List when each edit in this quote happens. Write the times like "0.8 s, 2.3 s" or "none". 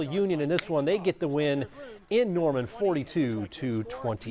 none